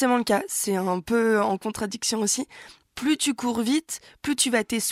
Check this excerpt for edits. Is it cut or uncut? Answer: uncut